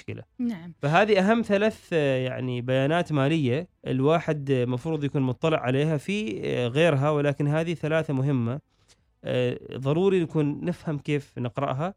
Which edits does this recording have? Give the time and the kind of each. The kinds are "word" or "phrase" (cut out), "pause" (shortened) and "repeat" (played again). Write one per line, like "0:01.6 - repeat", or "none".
0:03.8 - pause